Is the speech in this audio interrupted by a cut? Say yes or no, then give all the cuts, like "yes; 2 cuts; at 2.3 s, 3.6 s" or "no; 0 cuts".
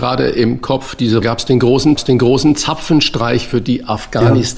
yes; 2 cuts; at 1.2 s, 2.0 s